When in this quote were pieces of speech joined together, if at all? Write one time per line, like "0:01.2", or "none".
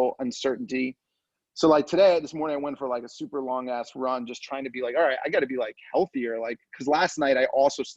none